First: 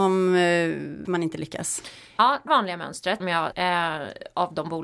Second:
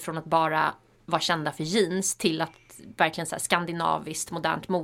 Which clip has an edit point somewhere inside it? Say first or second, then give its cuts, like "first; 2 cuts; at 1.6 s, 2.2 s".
first; 4 cuts; at 1.1 s, 2.5 s, 3.2 s, 3.5 s